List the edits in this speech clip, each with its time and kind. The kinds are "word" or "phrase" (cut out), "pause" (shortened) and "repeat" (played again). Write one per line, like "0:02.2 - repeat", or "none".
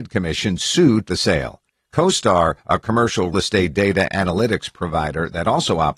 0:01.1 - phrase
0:01.7 - pause
0:03.3 - word
0:04.1 - word